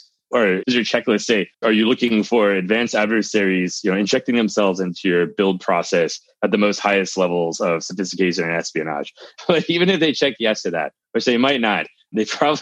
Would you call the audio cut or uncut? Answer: cut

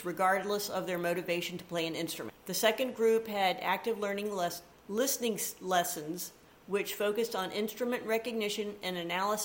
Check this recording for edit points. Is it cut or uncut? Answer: uncut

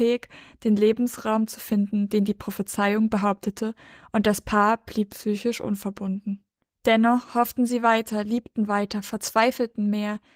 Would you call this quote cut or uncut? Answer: uncut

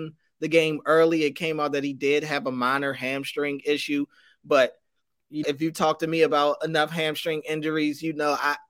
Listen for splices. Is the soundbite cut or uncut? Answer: cut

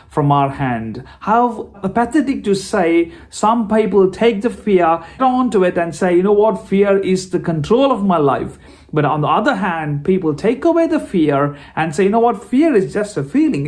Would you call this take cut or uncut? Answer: cut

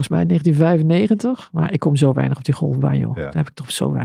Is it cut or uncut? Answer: uncut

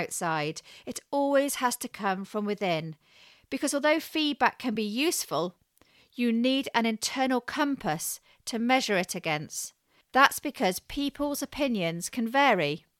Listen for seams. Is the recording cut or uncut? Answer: uncut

